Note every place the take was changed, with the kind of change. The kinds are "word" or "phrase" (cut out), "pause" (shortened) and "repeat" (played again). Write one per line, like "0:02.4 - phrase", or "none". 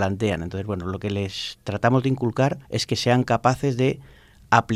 0:02.6 - pause

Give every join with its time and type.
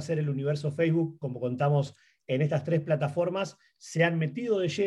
none

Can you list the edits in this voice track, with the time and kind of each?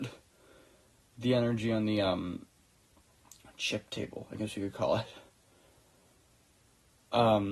none

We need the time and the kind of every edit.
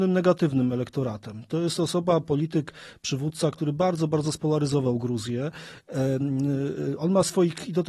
none

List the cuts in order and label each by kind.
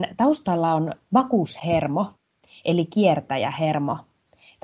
0:01.0 - pause

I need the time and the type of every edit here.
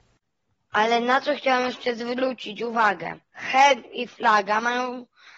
0:03.2 - pause

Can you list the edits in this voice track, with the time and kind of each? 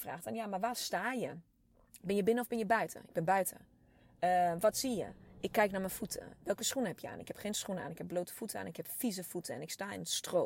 none

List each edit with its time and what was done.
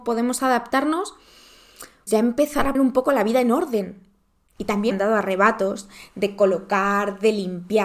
0:02.1 - word
0:02.7 - word
0:04.9 - word

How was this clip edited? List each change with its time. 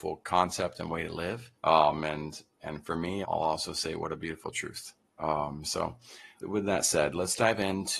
0:01.5 - pause
0:03.2 - word
0:05.0 - pause
0:06.4 - word

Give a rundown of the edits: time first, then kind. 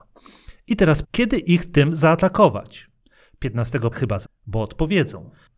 0:01.0 - word
0:03.9 - word
0:04.2 - word

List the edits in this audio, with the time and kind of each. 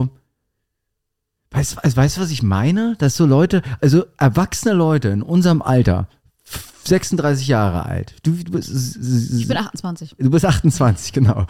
none

